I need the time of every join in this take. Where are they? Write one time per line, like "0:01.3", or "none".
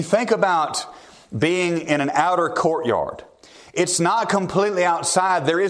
none